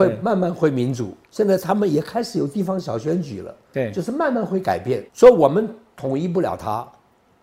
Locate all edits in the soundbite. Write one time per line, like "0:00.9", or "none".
0:01.2
0:05.1